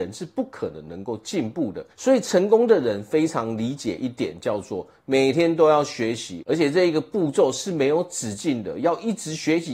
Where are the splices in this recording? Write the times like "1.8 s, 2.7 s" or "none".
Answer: 1.9 s